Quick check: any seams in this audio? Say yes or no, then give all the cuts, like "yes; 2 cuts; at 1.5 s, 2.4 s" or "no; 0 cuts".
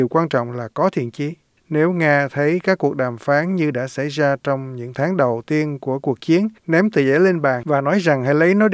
yes; 2 cuts; at 1.6 s, 6.6 s